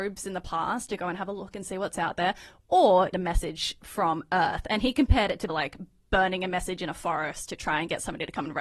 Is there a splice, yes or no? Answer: yes